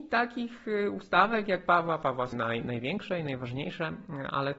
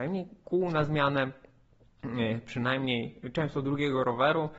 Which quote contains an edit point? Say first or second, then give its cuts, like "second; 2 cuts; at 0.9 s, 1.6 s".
first; 1 cut; at 2.3 s